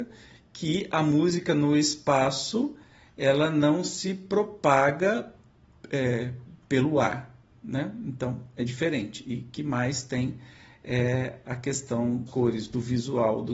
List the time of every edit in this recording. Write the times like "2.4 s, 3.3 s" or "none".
12.3 s